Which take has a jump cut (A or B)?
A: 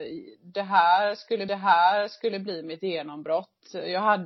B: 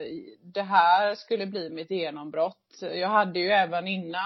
A